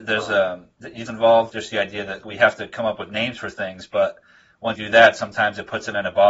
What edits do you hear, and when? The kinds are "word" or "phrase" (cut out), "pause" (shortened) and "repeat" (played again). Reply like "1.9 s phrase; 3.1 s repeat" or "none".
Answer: 1.1 s phrase; 1.5 s word; 2.2 s word; 4.8 s word